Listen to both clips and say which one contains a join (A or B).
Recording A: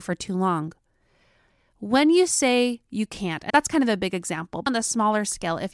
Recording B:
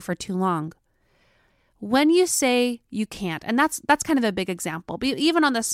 A